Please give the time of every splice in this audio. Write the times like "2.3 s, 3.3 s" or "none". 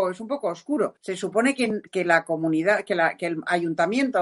1.0 s, 1.9 s